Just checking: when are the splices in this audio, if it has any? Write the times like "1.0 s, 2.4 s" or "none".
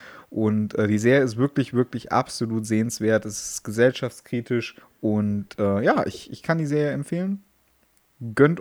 4.8 s